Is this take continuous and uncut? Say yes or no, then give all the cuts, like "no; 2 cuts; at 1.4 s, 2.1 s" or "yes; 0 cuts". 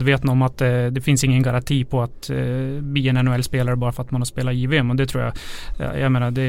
yes; 0 cuts